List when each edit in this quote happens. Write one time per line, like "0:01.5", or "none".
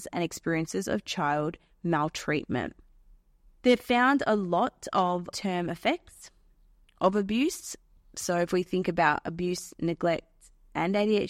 0:05.3